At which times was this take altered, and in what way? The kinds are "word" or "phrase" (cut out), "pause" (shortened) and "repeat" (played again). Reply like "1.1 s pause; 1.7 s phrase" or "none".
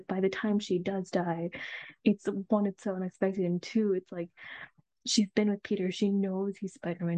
none